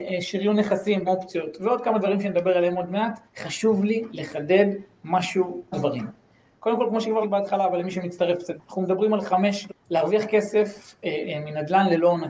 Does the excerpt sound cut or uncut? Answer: cut